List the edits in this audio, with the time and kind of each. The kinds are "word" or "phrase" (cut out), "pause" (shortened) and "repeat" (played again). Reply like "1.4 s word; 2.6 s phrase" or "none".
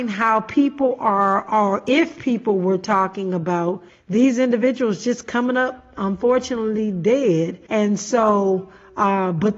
3.9 s pause; 7.7 s pause